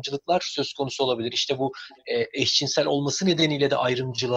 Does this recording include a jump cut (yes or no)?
yes